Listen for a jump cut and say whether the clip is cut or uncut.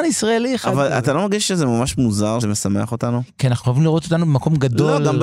cut